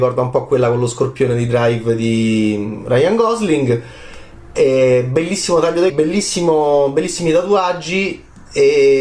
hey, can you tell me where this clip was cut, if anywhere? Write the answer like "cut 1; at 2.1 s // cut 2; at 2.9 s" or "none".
cut 1; at 5.9 s